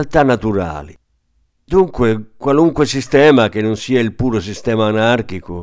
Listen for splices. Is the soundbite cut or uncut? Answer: uncut